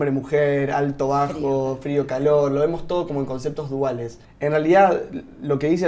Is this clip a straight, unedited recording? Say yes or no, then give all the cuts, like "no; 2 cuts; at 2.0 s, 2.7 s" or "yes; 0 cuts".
no; 1 cut; at 4.2 s